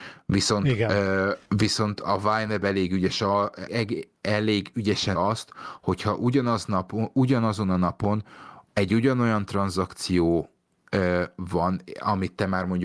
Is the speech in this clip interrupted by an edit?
yes; 4 cuts; at 1.5 s, 3.7 s, 5.1 s, 8.7 s

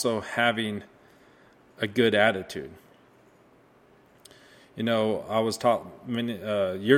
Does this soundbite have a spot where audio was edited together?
no; 0 cuts

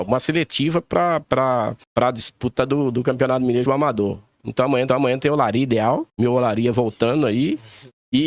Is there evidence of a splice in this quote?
yes; 4 cuts; at 1.8 s, 3.7 s, 4.9 s, 6.1 s

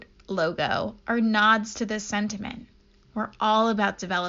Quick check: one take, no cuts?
yes; 0 cuts

